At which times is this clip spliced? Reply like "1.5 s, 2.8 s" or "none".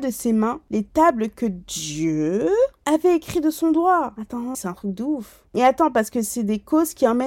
4.5 s